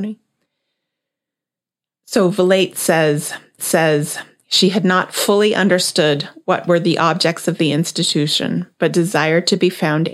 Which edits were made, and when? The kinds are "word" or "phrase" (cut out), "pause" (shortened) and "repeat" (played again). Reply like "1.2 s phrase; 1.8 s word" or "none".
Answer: 3.6 s repeat